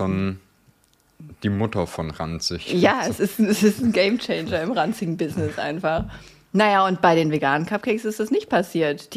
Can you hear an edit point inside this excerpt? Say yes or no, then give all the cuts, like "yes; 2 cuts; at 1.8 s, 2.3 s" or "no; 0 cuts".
no; 0 cuts